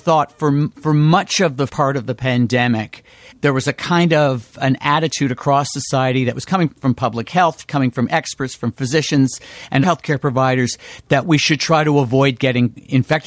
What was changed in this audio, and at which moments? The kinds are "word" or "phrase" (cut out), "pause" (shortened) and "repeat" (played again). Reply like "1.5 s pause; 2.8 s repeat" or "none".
1.7 s word; 3.3 s word; 6.7 s word; 9.8 s word